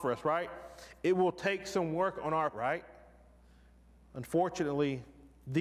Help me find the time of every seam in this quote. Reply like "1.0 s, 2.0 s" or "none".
2.5 s